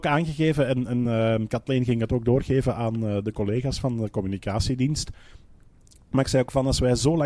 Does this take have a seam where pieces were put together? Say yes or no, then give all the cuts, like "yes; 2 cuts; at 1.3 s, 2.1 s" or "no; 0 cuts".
no; 0 cuts